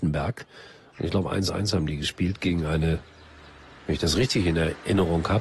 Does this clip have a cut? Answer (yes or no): no